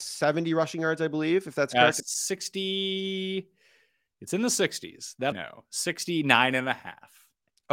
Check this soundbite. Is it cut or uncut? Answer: cut